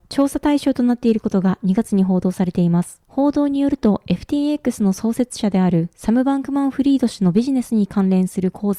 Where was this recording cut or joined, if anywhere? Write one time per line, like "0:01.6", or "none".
none